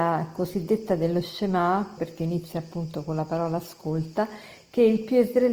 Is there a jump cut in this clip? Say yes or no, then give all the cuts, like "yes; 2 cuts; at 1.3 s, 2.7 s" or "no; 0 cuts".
yes; 1 cut; at 2.0 s